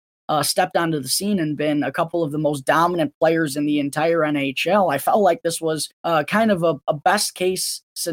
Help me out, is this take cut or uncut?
cut